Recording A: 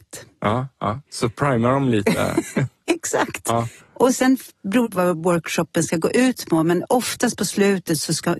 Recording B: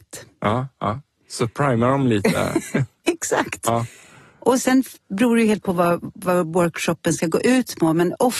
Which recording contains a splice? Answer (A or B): A